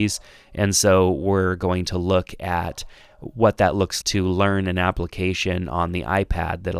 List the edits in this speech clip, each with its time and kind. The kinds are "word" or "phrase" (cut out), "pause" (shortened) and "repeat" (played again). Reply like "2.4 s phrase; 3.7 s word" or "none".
4.0 s word